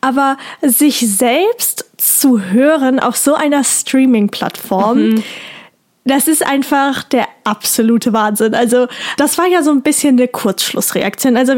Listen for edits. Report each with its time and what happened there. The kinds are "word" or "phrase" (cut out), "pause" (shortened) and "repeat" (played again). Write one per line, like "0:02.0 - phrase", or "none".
none